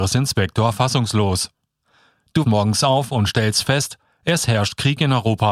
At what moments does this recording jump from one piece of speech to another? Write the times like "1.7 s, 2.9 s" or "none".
2.4 s